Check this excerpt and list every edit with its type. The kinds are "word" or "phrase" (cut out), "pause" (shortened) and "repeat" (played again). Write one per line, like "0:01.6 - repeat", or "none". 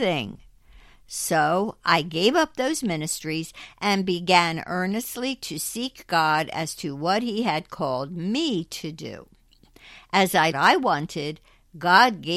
0:10.5 - phrase